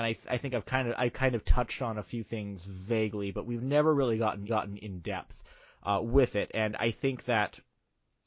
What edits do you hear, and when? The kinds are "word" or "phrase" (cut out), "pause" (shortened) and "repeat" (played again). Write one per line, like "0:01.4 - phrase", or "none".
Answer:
0:04.5 - repeat